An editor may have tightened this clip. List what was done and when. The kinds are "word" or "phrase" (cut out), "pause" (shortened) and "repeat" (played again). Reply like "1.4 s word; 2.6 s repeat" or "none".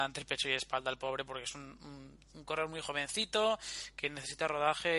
2.2 s pause